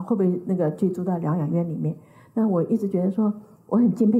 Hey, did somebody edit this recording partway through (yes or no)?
no